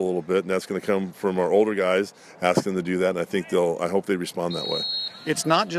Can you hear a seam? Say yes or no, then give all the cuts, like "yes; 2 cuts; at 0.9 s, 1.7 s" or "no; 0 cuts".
no; 0 cuts